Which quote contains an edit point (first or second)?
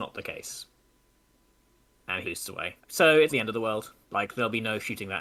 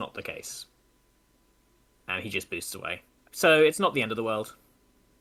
first